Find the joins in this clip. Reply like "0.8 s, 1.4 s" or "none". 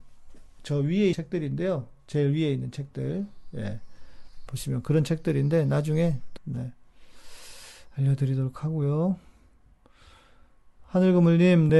1.1 s, 4.5 s, 6.4 s